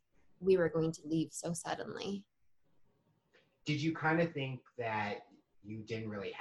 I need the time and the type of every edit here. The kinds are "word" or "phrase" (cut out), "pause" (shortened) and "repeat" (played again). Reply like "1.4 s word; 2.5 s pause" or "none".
none